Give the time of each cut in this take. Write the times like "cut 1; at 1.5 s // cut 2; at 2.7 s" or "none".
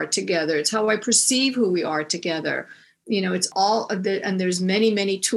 none